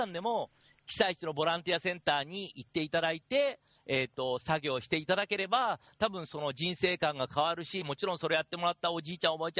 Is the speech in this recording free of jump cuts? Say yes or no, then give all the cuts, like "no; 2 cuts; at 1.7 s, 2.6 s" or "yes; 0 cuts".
yes; 0 cuts